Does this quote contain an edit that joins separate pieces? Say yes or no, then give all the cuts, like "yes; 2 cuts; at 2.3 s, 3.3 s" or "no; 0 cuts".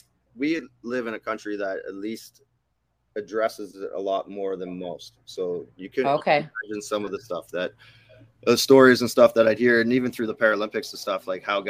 no; 0 cuts